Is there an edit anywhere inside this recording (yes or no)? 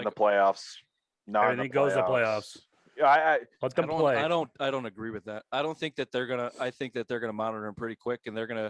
yes